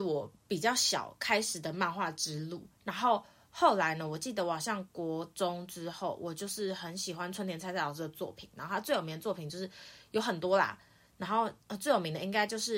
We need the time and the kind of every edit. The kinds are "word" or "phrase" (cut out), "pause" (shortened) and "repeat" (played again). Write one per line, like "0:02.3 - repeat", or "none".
0:11.6 - pause